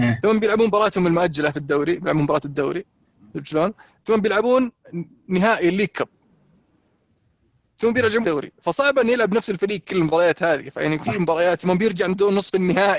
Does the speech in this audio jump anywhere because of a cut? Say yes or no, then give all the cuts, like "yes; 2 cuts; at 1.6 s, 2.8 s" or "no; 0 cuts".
yes; 1 cut; at 8.2 s